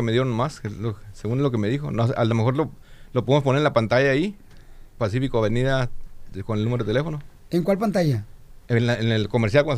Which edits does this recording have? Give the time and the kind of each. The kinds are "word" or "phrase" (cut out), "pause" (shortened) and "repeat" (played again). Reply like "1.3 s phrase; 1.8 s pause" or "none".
none